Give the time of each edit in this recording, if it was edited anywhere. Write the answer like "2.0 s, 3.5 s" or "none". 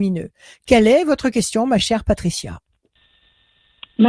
none